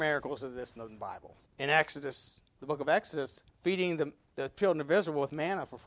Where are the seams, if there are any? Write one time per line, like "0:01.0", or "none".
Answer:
0:01.5
0:03.5